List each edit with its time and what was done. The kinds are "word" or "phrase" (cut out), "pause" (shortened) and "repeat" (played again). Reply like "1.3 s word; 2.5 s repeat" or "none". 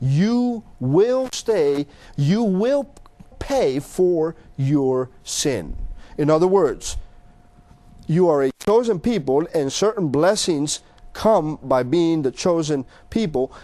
3.3 s word